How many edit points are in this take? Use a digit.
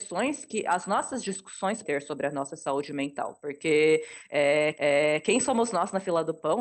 2